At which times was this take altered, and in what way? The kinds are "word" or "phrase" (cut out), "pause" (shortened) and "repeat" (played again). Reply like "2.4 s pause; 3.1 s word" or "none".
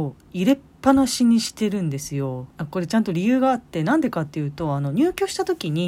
2.5 s pause